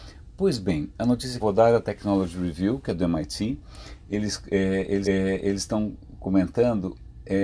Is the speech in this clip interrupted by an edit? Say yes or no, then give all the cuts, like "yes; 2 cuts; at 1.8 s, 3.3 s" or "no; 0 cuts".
yes; 2 cuts; at 1.4 s, 5.0 s